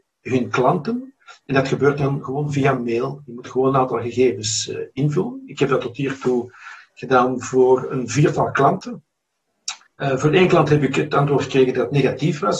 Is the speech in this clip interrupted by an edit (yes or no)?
yes